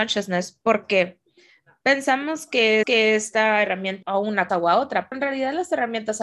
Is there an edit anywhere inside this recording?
yes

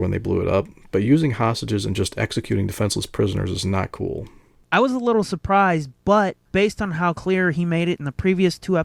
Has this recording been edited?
no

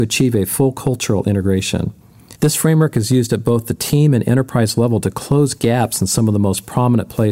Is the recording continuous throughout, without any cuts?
no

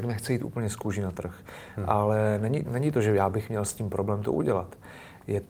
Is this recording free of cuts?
no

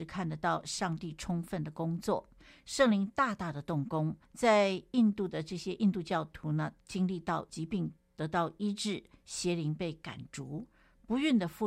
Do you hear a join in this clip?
yes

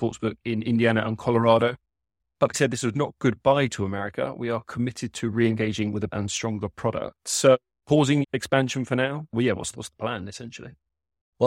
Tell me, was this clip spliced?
yes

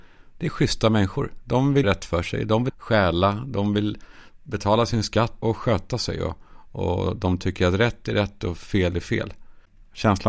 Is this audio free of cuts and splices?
no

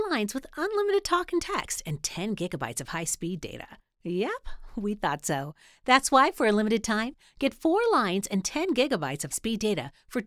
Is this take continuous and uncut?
no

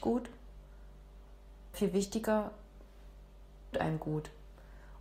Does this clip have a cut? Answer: yes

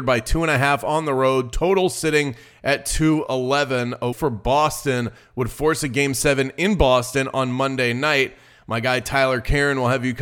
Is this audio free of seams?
no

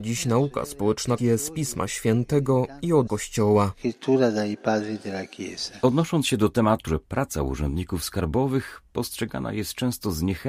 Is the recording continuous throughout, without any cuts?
no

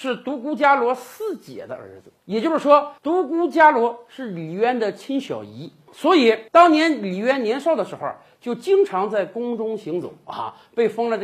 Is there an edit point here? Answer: yes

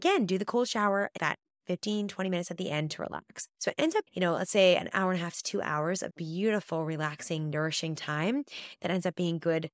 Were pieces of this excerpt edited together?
yes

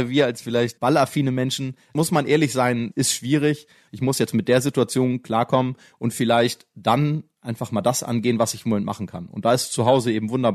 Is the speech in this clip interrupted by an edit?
no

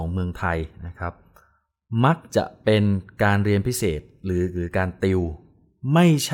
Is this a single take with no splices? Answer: yes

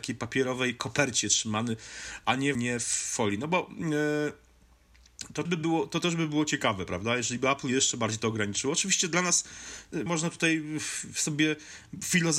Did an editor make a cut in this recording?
yes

